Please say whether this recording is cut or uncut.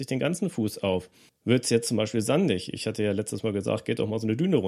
cut